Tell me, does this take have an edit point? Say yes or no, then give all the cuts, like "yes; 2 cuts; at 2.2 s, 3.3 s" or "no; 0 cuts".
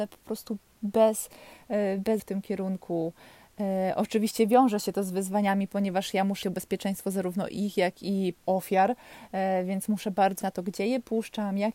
yes; 4 cuts; at 2.2 s, 6.4 s, 8.4 s, 10.4 s